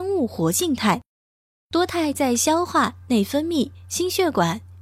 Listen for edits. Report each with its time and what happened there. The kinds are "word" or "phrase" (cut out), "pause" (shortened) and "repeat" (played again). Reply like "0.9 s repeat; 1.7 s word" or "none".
none